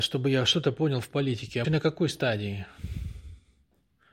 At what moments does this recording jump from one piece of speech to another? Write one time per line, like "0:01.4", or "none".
0:01.6